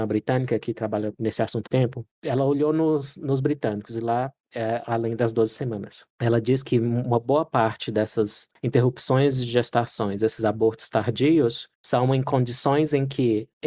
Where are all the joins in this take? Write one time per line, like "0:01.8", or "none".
0:01.7